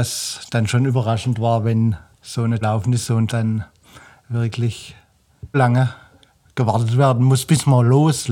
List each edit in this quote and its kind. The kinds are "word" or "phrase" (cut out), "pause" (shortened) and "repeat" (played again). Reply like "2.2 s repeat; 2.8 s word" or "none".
2.1 s pause; 2.6 s phrase; 3.3 s phrase; 5.5 s word

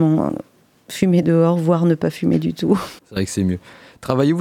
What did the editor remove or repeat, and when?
3.0 s pause

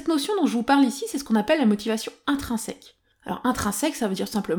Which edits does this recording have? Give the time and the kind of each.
none

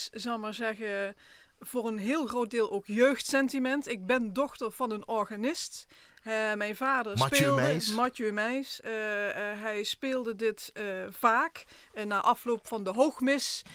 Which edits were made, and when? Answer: none

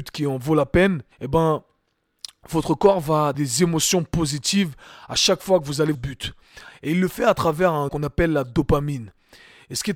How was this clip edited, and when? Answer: 1.1 s pause; 3.3 s word; 5.9 s phrase; 7.9 s word

